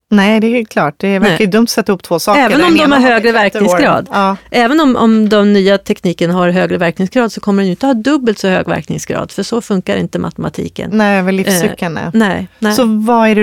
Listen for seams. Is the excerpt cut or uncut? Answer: uncut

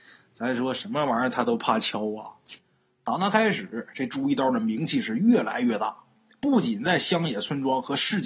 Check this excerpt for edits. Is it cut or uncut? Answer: uncut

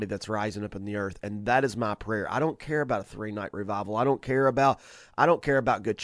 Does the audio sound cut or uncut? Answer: uncut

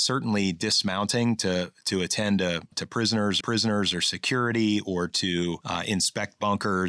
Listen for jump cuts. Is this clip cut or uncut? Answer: cut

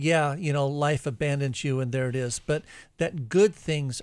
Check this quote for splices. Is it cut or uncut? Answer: uncut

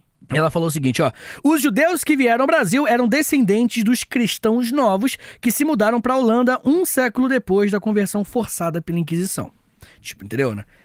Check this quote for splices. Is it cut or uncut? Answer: uncut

